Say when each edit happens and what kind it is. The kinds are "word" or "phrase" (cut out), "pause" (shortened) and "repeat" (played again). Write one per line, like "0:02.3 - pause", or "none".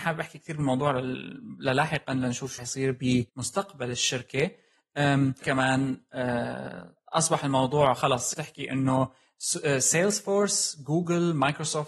0:02.6 - word
0:03.3 - pause
0:05.4 - phrase
0:08.3 - phrase